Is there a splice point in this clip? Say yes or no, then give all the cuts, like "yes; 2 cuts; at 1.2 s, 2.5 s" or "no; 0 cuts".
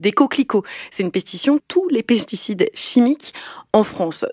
yes; 1 cut; at 1.6 s